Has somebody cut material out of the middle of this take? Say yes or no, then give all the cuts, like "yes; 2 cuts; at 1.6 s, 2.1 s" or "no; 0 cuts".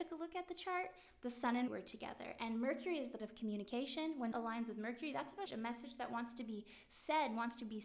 yes; 4 cuts; at 1.7 s, 3.2 s, 4.3 s, 5.5 s